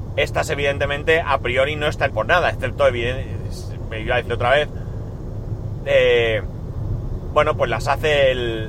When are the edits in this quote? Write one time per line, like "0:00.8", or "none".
0:02.1
0:04.3
0:05.8